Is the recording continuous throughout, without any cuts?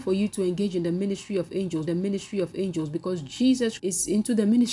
no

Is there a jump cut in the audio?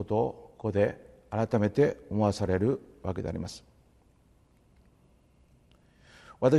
no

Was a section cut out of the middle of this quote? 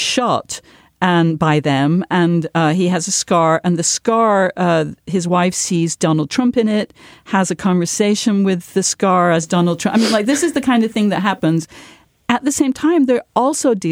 no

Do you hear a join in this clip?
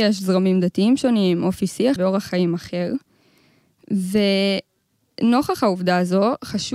yes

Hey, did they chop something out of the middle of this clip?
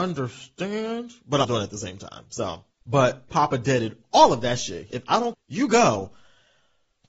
yes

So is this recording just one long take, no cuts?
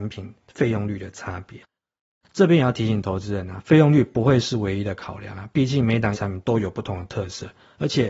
no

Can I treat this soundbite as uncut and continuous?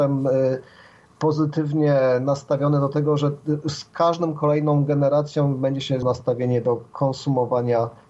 no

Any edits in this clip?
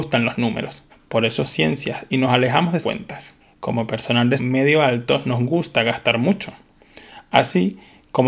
yes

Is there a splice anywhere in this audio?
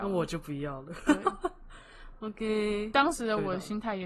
no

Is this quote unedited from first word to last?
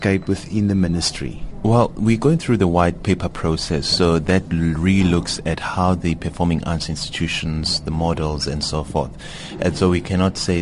yes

